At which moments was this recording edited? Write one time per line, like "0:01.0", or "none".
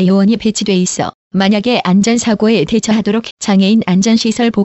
0:03.3